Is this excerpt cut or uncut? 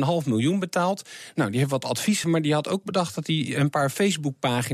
cut